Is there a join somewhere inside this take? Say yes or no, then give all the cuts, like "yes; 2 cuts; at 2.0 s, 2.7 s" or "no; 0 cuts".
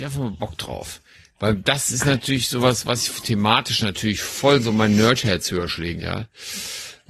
yes; 1 cut; at 6.0 s